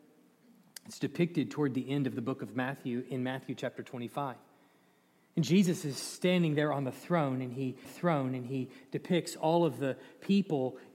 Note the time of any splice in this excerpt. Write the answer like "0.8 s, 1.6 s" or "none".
7.8 s

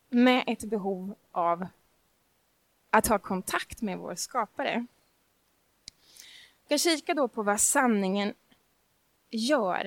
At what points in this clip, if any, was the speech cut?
none

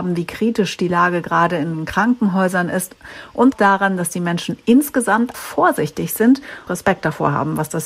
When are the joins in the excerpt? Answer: 3.5 s, 5.3 s, 6.7 s

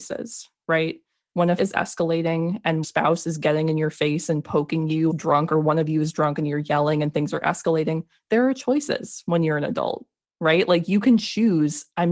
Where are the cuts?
1.6 s, 2.8 s, 5.1 s

